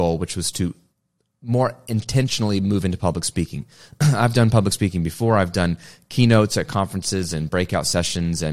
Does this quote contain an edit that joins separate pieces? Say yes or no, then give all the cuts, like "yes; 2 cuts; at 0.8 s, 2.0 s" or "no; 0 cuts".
no; 0 cuts